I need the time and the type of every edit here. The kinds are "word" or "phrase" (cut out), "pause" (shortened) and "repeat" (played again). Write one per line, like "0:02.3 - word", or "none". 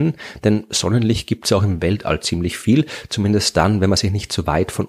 none